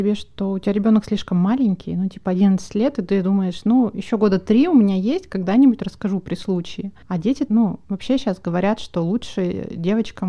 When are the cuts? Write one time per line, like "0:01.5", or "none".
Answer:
0:07.0
0:07.5
0:07.8